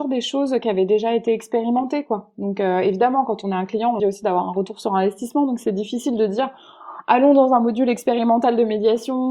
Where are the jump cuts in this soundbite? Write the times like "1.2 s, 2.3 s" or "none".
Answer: 4.0 s